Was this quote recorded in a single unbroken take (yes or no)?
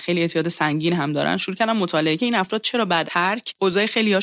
no